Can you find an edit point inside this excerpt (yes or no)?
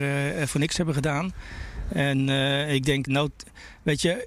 yes